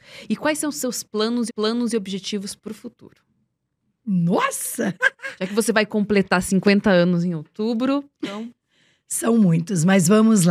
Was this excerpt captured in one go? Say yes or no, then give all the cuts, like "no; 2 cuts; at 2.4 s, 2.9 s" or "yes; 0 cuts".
no; 2 cuts; at 1.5 s, 8.1 s